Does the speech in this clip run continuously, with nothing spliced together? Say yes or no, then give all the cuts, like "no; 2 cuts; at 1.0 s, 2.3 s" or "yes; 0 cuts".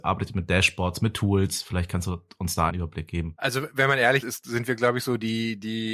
no; 2 cuts; at 2.7 s, 4.2 s